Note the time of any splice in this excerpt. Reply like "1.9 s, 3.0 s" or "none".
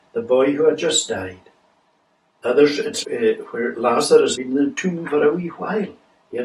3.0 s, 4.4 s